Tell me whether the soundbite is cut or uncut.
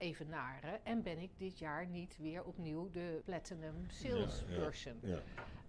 cut